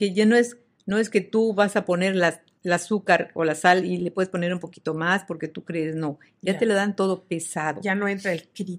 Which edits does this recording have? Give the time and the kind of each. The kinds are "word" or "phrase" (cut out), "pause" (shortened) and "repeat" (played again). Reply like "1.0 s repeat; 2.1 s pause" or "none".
2.6 s pause

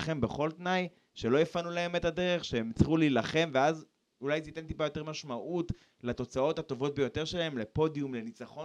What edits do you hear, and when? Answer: none

